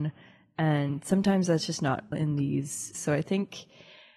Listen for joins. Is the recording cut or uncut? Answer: cut